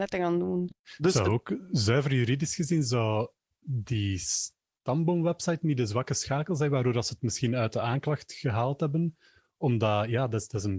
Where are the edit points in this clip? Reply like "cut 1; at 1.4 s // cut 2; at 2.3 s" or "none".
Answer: none